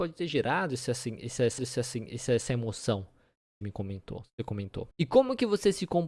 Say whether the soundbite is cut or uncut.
cut